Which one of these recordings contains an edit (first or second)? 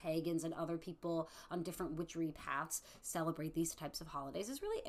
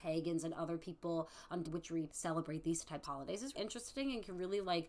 second